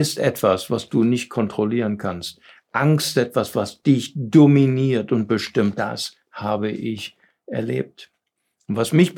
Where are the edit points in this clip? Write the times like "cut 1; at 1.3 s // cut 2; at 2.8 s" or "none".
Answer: cut 1; at 3.1 s // cut 2; at 5.7 s